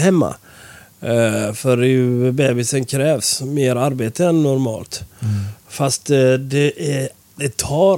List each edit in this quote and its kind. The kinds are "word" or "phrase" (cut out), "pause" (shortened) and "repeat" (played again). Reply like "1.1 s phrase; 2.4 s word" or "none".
none